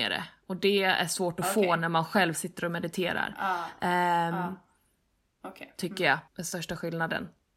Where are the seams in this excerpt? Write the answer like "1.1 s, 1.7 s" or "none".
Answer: 6.3 s